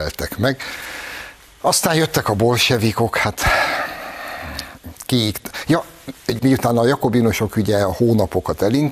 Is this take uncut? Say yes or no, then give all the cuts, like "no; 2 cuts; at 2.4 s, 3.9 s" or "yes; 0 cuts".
no; 1 cut; at 6.4 s